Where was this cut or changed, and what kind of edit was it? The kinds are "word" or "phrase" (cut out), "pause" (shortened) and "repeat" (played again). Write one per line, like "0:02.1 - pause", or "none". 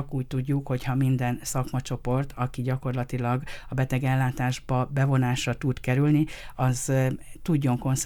none